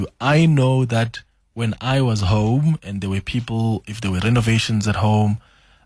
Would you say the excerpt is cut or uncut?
uncut